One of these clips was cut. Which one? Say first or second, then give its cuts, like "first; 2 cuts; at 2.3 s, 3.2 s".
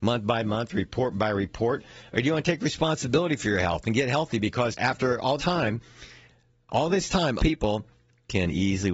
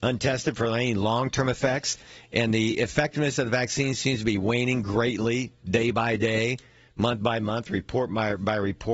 first; 4 cuts; at 1.1 s, 4.7 s, 5.4 s, 7.4 s